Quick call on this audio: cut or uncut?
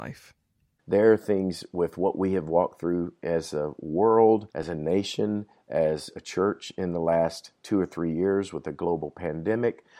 cut